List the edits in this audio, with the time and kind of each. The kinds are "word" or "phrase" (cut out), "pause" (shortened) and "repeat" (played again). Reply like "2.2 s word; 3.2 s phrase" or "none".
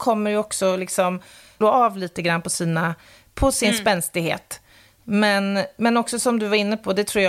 1.6 s phrase